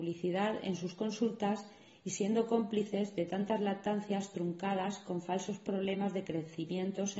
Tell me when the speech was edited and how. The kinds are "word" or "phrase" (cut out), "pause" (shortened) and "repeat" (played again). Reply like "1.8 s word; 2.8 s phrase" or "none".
none